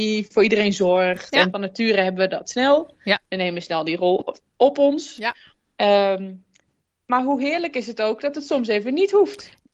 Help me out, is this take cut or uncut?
cut